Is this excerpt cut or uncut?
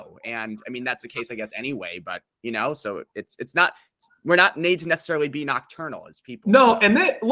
uncut